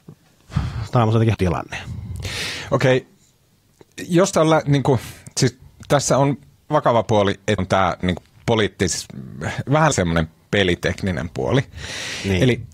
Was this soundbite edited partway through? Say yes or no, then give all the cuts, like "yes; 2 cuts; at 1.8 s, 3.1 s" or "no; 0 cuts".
yes; 6 cuts; at 1.3 s, 4.3 s, 6.7 s, 7.6 s, 8.0 s, 9.9 s